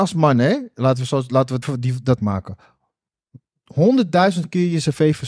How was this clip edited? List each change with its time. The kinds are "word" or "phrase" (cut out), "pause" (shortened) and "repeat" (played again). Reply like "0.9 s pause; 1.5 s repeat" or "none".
1.6 s word; 2.2 s word